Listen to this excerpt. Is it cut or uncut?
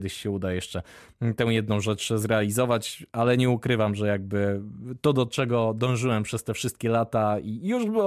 uncut